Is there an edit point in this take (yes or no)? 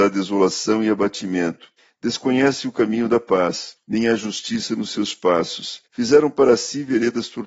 yes